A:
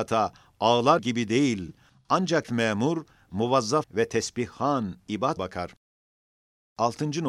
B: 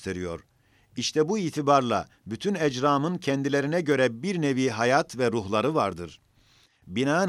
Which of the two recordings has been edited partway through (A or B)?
A